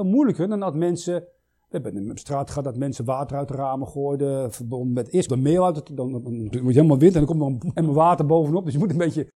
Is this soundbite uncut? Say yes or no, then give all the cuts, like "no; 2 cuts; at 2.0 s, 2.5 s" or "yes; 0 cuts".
no; 3 cuts; at 5.3 s, 6.5 s, 7.8 s